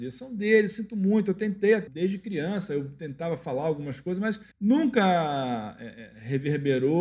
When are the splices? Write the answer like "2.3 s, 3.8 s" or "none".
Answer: 4.5 s